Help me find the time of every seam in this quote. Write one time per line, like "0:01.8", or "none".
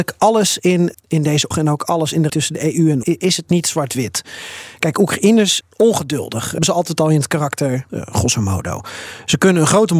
0:00.9
0:01.5
0:02.3
0:03.0
0:05.6
0:06.6
0:07.9

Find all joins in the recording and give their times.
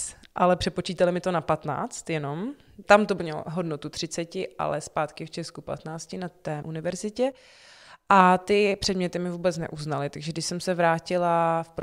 0:02.8
0:06.6

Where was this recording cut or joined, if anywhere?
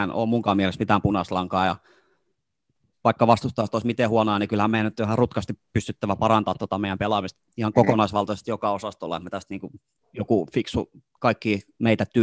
none

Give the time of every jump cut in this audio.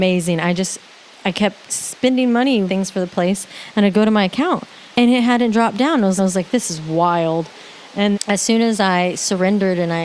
0:02.7
0:04.9
0:06.2
0:08.1

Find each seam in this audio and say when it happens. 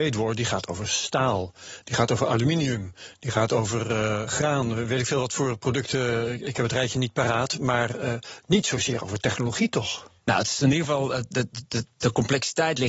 none

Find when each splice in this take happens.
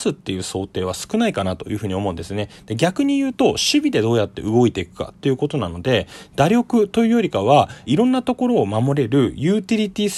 0:07.9

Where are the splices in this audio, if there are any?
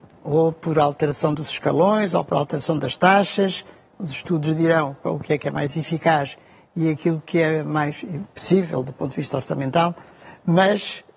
none

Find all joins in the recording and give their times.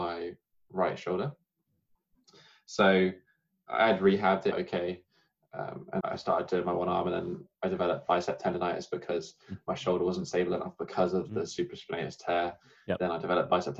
0:04.5
0:06.0

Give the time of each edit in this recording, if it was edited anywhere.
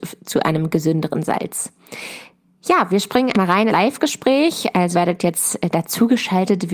0:03.3
0:03.7
0:04.9

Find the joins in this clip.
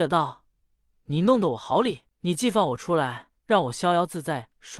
0:02.1
0:03.4

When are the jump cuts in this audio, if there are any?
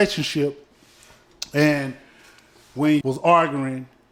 0:03.0

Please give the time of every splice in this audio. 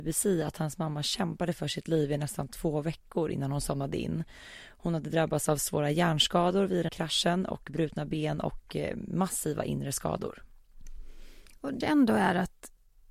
0:06.9
0:11.8

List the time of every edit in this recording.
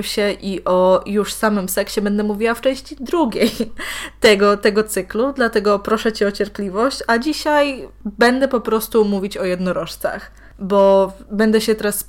none

